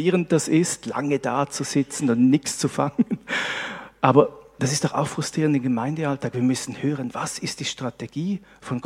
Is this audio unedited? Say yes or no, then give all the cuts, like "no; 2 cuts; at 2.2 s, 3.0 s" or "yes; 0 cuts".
yes; 0 cuts